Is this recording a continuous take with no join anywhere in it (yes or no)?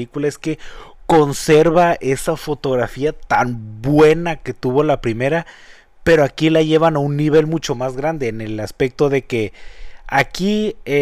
yes